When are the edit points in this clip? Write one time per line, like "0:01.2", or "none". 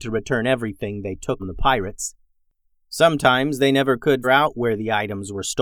0:01.4
0:04.2